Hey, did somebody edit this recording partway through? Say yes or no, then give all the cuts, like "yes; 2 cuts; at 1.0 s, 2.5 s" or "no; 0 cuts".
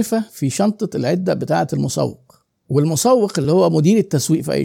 no; 0 cuts